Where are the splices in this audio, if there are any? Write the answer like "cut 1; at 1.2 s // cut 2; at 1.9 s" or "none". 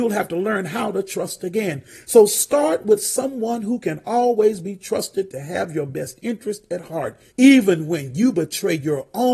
cut 1; at 7.3 s

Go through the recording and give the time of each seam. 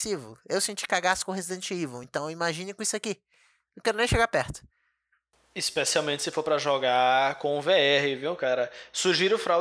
none

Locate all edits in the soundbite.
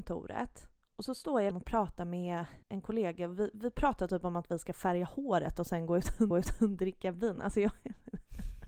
cut 1; at 1.5 s // cut 2; at 2.6 s // cut 3; at 6.3 s

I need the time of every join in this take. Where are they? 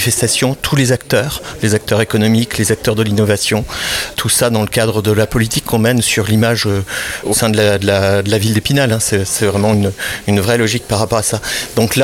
none

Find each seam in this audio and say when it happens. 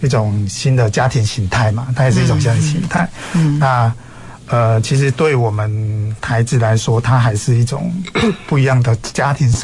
none

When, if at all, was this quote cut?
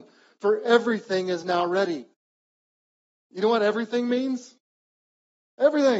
none

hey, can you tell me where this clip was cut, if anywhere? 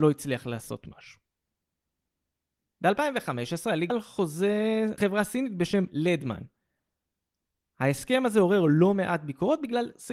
cut 1; at 3.9 s // cut 2; at 5.0 s

